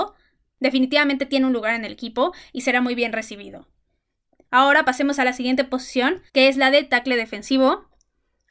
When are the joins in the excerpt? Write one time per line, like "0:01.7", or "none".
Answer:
0:06.3